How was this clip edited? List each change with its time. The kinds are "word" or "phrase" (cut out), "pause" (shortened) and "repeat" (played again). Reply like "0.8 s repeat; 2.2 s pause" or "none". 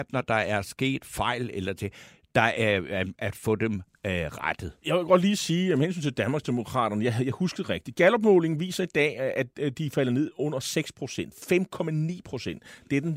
none